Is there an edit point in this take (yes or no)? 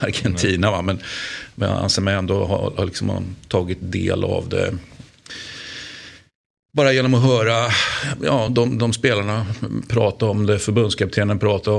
no